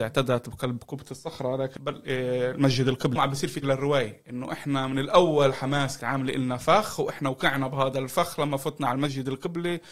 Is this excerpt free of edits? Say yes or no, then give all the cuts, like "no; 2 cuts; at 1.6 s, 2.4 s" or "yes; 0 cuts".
no; 4 cuts; at 1.8 s, 3.2 s, 3.6 s, 6.0 s